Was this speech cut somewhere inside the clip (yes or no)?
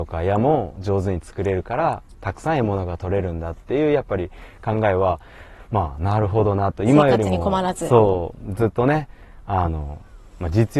no